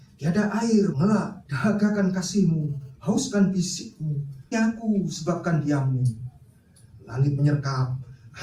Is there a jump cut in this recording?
yes; 3 cuts; at 0.9 s, 1.4 s, 4.5 s

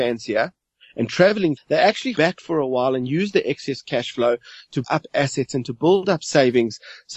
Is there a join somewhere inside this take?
yes; 3 cuts; at 1.6 s, 2.2 s, 4.8 s

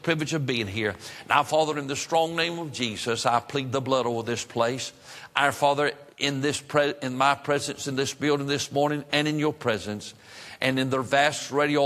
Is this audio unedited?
no; 1 cut; at 6.1 s

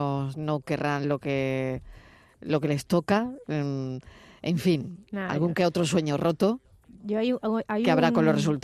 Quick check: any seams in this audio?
no; 0 cuts

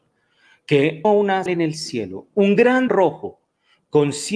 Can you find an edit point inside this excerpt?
yes; 3 cuts; at 1.0 s, 1.5 s, 2.9 s

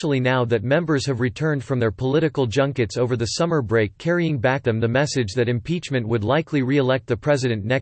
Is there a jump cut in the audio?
yes; 1 cut; at 4.6 s

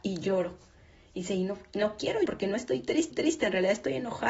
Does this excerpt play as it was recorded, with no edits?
no; 2 cuts; at 2.2 s, 3.1 s

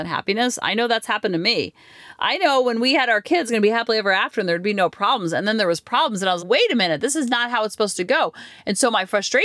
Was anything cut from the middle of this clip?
yes; 2 cuts; at 3.5 s, 6.4 s

